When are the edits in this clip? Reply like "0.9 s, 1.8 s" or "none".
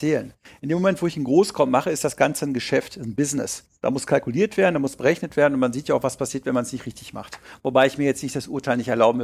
none